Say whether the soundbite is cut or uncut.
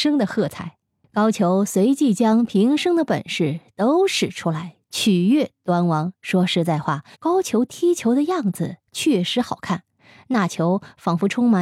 cut